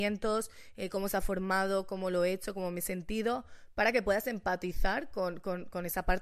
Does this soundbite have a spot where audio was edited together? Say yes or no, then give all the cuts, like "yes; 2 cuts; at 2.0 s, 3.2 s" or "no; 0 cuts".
no; 0 cuts